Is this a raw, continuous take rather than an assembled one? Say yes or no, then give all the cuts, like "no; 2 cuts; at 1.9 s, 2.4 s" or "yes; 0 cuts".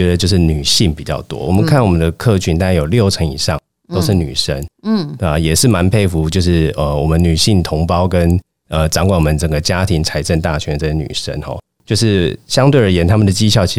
yes; 0 cuts